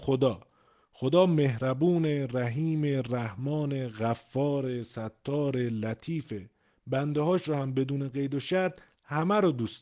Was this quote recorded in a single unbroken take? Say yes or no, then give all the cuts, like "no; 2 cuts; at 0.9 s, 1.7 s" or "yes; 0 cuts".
yes; 0 cuts